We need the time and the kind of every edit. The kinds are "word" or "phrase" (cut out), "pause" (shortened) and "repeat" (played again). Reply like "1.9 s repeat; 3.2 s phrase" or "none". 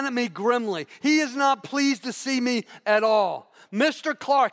none